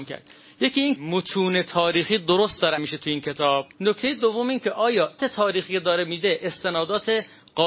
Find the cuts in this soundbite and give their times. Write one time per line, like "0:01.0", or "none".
0:01.0
0:02.8
0:03.7
0:05.2